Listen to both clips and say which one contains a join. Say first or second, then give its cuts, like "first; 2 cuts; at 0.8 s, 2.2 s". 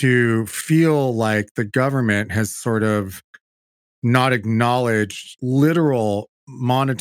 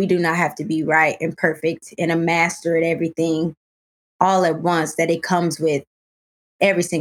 first; 1 cut; at 5.4 s